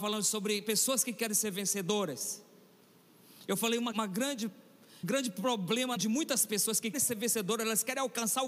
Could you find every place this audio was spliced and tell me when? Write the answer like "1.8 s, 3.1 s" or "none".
3.9 s, 5.0 s, 6.0 s, 6.9 s